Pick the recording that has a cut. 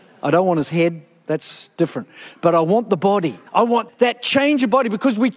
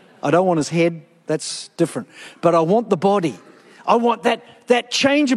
first; 2 cuts; at 3.5 s, 3.9 s

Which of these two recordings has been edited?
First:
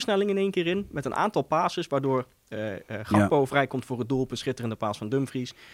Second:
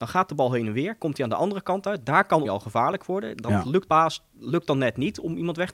second; 2 cuts; at 2.4 s, 3.9 s

